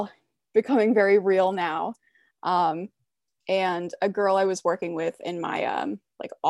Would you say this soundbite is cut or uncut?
uncut